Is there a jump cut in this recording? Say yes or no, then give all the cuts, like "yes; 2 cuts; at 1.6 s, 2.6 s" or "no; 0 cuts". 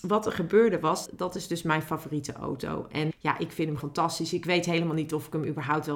yes; 3 cuts; at 1.1 s, 3.1 s, 3.8 s